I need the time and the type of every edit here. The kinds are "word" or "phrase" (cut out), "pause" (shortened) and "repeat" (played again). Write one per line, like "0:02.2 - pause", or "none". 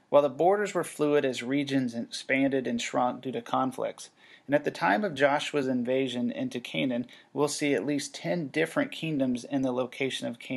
none